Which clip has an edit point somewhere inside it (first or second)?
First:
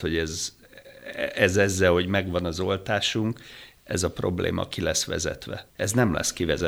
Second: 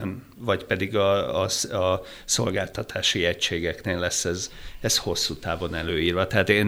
first